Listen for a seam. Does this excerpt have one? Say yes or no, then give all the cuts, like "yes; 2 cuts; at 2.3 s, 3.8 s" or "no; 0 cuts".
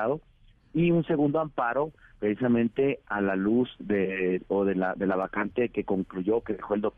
no; 0 cuts